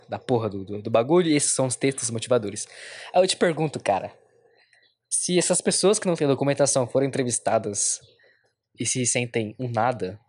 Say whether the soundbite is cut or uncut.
uncut